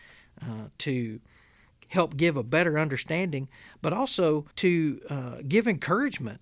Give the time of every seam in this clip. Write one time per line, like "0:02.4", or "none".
0:04.5